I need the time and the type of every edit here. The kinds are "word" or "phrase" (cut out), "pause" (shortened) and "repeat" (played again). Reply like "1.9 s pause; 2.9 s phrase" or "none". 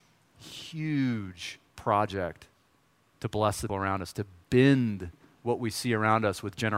1.7 s pause; 3.7 s word